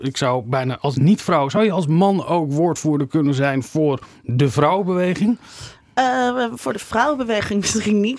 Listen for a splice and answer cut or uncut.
uncut